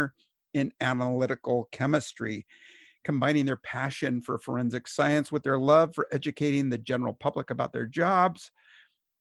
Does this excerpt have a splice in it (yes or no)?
no